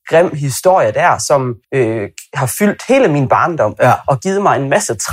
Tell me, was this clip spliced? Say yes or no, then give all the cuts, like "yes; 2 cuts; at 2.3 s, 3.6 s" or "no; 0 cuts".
yes; 1 cut; at 1.6 s